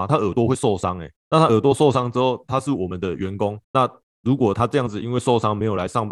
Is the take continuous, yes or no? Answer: no